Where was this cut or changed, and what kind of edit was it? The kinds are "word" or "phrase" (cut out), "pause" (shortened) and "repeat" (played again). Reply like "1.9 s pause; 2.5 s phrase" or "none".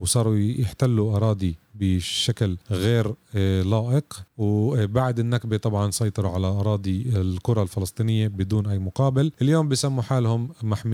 2.6 s pause; 4.3 s pause; 9.3 s pause

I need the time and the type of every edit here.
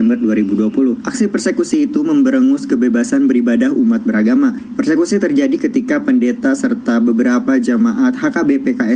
none

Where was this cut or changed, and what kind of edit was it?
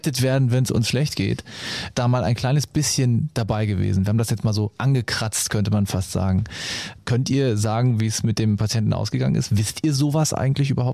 none

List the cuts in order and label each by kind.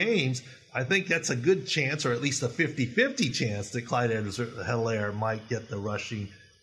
none

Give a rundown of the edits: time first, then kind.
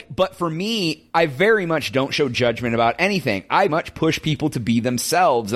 3.7 s word

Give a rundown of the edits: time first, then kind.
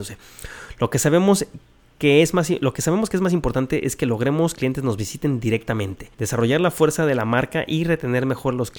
4.6 s phrase; 6.1 s pause

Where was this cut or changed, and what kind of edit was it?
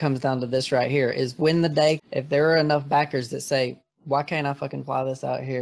2.0 s word

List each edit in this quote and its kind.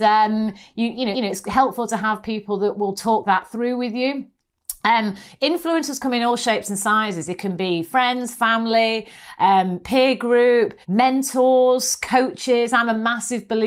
1.1 s repeat; 10.8 s pause

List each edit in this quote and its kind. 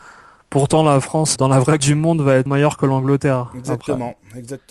1.4 s word; 1.8 s word; 2.5 s word

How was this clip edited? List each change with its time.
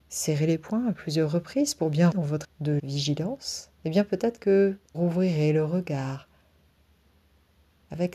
2.1 s word; 2.4 s word; 2.8 s word; 3.7 s pause; 4.9 s word

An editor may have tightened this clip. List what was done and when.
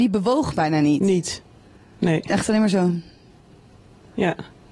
none

